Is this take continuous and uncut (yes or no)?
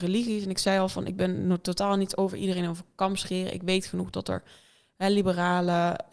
yes